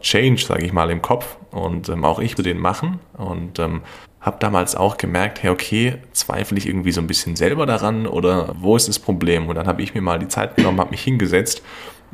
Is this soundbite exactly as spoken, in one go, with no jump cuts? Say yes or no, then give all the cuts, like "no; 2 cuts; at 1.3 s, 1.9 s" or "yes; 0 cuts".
no; 4 cuts; at 2.4 s, 4.0 s, 6.6 s, 8.5 s